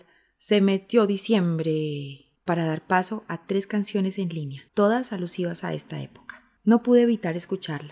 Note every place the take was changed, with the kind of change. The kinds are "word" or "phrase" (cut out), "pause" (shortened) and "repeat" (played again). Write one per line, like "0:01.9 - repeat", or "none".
0:02.4 - pause
0:04.7 - pause
0:06.6 - pause